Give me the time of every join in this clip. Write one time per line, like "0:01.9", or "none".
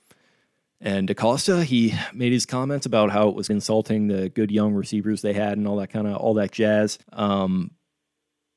0:03.5
0:07.0